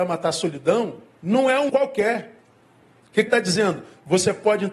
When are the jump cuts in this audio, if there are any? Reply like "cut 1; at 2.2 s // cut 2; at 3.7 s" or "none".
cut 1; at 1.2 s // cut 2; at 1.7 s // cut 3; at 3.3 s